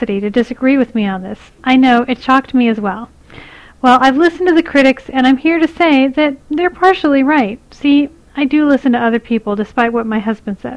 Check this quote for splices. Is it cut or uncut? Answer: uncut